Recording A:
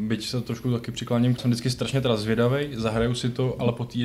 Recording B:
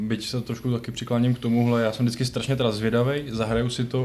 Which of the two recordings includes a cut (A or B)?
A